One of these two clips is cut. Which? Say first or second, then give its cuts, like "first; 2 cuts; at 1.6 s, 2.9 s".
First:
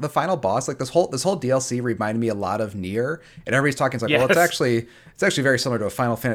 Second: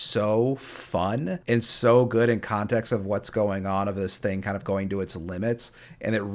second; 1 cut; at 1.4 s